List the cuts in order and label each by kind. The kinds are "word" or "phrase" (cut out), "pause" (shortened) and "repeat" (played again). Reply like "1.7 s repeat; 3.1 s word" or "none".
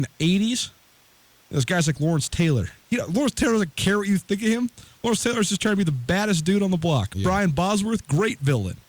none